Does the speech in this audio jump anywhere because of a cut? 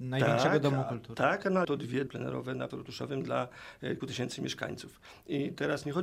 yes; 4 cuts; at 1.6 s, 2.1 s, 2.7 s, 4.0 s

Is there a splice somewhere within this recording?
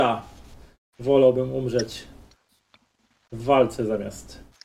no; 0 cuts

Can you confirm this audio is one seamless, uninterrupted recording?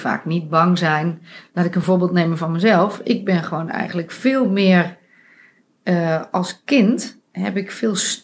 yes; 0 cuts

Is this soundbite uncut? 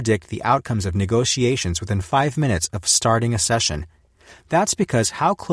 yes; 0 cuts

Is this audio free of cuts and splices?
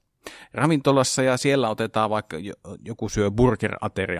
yes; 0 cuts

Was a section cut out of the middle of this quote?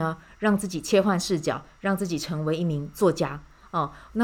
no; 0 cuts

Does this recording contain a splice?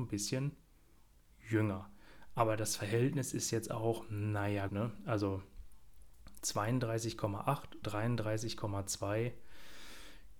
yes; 2 cuts; at 4.7 s, 7.8 s

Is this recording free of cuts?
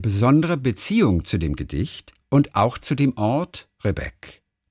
yes; 0 cuts

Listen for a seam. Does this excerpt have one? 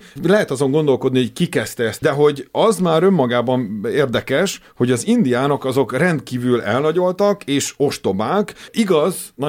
yes; 1 cut; at 2.0 s

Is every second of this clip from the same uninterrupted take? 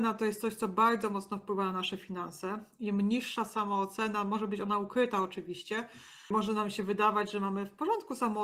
yes; 0 cuts

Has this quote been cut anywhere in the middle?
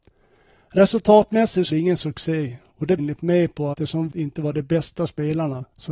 yes; 4 cuts; at 1.7 s, 3.0 s, 3.7 s, 4.1 s

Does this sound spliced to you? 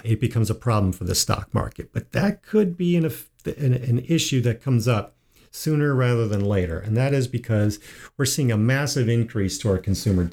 no; 0 cuts

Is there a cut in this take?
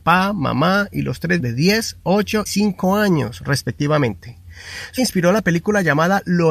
yes; 3 cuts; at 1.4 s, 2.5 s, 5.0 s

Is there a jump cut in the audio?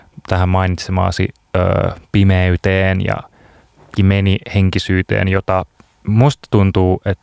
yes; 1 cut; at 4.0 s

